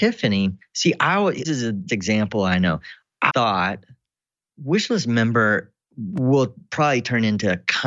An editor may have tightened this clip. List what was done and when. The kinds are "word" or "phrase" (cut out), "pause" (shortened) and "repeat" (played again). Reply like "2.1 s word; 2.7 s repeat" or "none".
1.4 s word; 1.9 s word; 3.3 s word; 5.9 s word

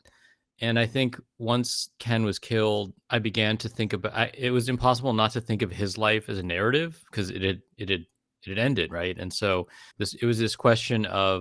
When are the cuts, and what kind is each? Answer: 3.0 s pause; 9.9 s pause

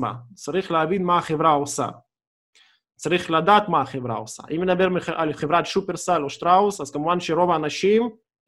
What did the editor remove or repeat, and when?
none

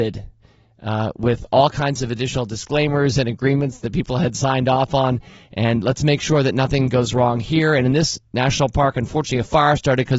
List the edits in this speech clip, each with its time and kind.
none

